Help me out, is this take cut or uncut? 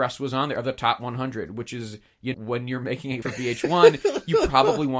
cut